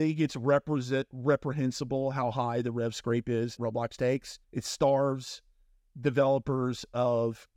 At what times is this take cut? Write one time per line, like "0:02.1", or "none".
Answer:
0:03.6
0:04.4